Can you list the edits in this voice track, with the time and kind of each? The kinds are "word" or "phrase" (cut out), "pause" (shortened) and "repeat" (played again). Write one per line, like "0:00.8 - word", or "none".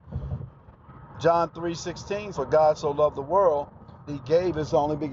0:02.3 - word
0:04.1 - word